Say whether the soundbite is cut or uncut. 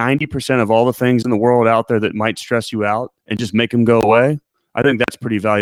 cut